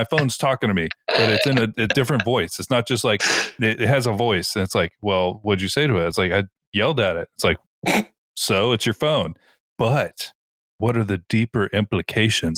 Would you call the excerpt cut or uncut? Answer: uncut